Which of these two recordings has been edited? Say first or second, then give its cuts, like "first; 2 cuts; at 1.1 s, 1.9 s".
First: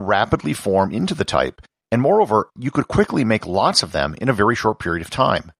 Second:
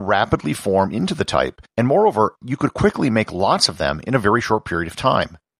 second; 1 cut; at 1.7 s